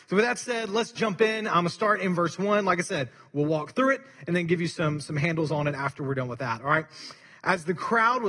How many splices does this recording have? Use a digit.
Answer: 0